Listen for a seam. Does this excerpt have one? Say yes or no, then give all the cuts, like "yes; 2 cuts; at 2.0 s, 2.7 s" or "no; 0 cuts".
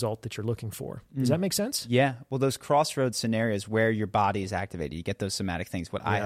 no; 0 cuts